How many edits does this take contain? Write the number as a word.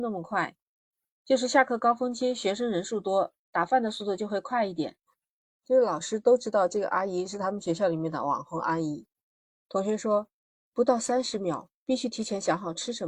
zero